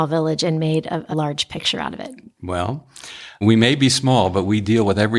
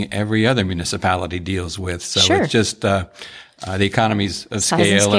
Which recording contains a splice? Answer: first; 2 cuts; at 1.1 s, 3.4 s

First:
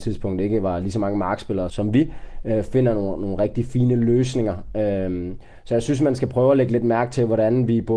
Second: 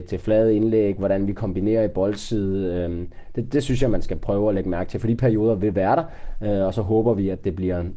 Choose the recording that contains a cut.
first; 1 cut; at 1.7 s

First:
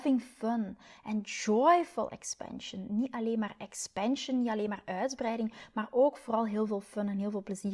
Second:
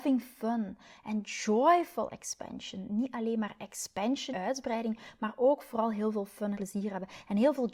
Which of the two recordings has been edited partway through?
second; 2 cuts; at 4.3 s, 6.5 s

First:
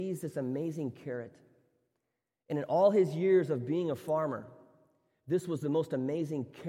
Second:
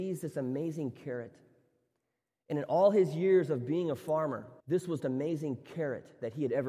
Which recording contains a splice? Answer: second; 2 cuts; at 4.6 s, 5.0 s

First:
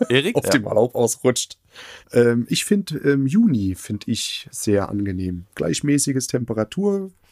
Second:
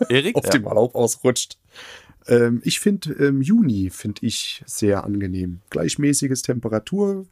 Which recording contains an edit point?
first; 1 cut; at 2.0 s

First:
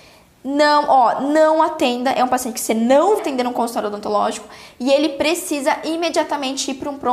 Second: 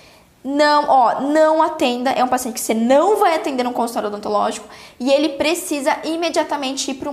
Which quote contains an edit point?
first; 1 cut; at 3.2 s

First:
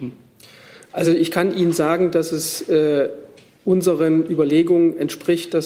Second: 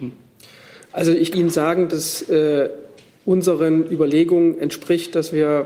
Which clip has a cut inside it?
second; 2 cuts; at 1.3 s, 1.9 s

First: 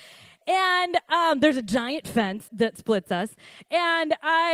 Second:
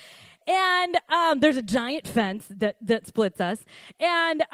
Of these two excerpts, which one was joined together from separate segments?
first; 1 cut; at 2.5 s

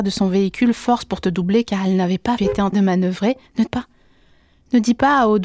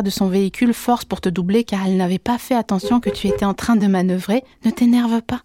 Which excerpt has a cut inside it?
first; 3 cuts; at 2.4 s, 2.7 s, 3.7 s

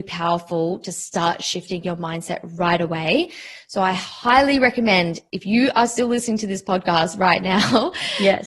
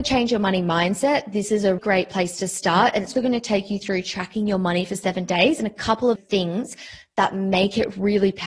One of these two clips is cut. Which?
second; 3 cuts; at 1.8 s, 3.1 s, 6.1 s

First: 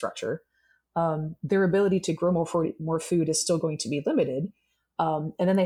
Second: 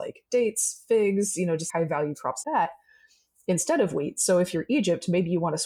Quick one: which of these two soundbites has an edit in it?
second; 2 cuts; at 1.7 s, 2.4 s

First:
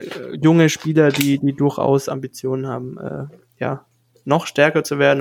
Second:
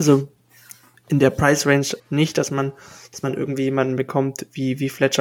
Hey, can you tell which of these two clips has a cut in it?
second; 1 cut; at 2.0 s

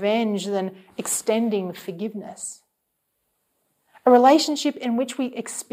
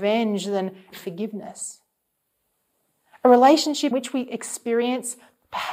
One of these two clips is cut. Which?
second; 2 cuts; at 0.9 s, 3.9 s

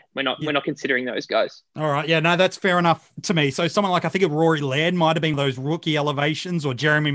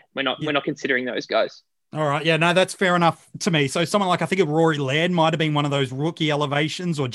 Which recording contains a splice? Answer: first; 2 cuts; at 1.7 s, 5.3 s

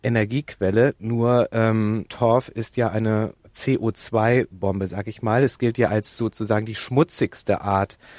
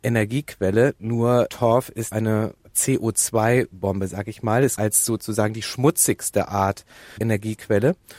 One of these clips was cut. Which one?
second; 4 cuts; at 1.5 s, 2.1 s, 4.8 s, 7.2 s

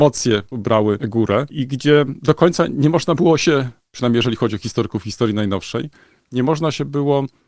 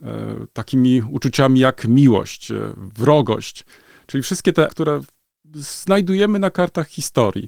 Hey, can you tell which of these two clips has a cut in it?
second; 1 cut; at 4.7 s

